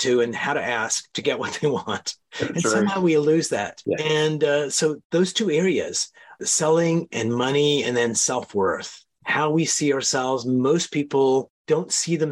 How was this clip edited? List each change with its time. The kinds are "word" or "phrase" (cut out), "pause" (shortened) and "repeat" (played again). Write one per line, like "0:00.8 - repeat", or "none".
none